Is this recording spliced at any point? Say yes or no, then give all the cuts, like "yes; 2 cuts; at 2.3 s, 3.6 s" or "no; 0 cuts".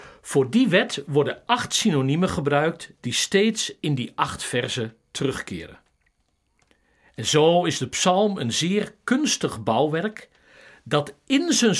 no; 0 cuts